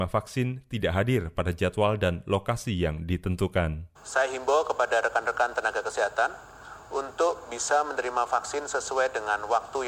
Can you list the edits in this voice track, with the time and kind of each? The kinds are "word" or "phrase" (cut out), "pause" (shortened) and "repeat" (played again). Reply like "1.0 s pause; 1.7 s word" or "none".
4.0 s pause